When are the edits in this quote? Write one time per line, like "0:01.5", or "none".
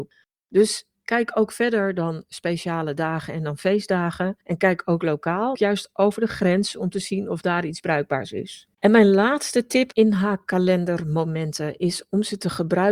0:04.4
0:05.5
0:08.7
0:09.9